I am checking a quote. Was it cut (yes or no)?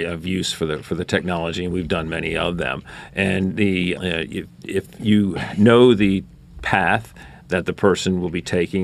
yes